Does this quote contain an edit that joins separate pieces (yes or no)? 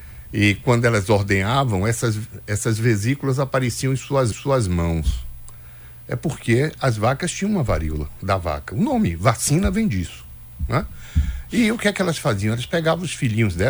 yes